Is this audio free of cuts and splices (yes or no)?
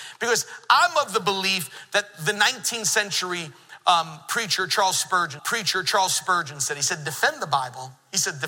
no